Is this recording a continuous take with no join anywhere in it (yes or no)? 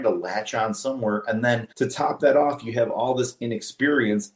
no